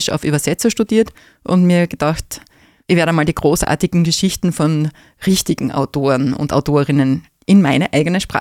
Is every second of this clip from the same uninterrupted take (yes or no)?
yes